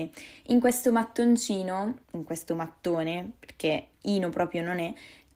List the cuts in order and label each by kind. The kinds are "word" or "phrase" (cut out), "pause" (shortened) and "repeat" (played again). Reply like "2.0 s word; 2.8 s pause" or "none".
2.0 s pause; 3.9 s pause